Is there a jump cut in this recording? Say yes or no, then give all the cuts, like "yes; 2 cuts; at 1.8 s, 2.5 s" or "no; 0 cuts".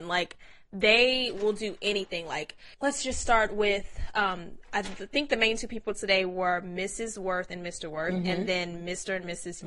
yes; 1 cut; at 2.7 s